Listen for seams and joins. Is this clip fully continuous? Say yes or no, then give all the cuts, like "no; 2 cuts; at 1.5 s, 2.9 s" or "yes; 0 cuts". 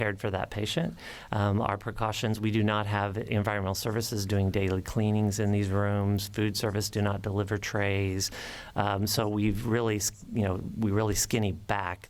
yes; 0 cuts